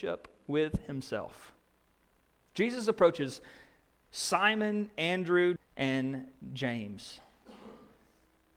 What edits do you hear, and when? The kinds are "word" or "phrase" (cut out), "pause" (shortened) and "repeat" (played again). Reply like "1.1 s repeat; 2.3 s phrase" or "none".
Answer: 2.1 s pause; 5.6 s word